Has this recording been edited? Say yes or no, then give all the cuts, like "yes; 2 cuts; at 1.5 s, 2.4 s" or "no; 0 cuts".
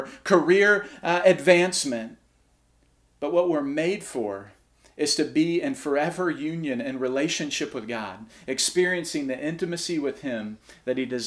no; 0 cuts